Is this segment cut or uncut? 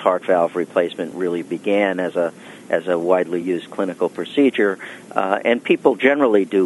uncut